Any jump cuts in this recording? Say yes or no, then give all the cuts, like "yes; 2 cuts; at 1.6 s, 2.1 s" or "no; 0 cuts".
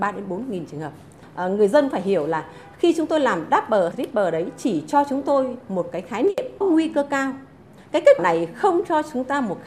yes; 4 cuts; at 1.9 s, 3.9 s, 6.6 s, 8.2 s